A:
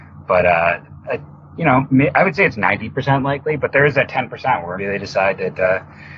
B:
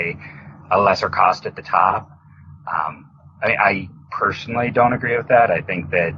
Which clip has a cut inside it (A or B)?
A